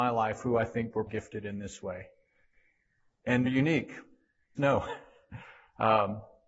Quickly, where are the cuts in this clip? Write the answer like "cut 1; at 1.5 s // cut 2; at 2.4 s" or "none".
cut 1; at 1.1 s // cut 2; at 3.5 s // cut 3; at 4.6 s